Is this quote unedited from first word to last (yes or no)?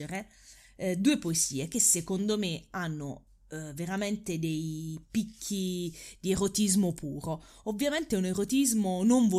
yes